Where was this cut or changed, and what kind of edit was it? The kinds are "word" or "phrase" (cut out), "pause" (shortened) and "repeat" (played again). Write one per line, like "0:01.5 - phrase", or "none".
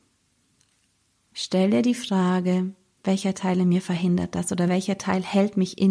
none